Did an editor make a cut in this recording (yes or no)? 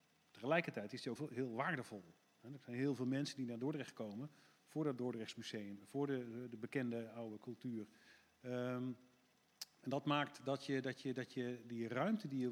yes